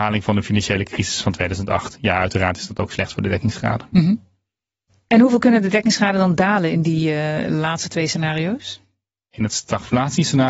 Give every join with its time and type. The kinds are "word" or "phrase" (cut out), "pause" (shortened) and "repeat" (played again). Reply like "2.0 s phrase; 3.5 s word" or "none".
none